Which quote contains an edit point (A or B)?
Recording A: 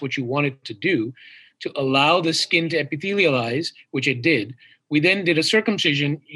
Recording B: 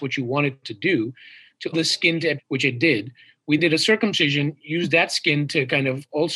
B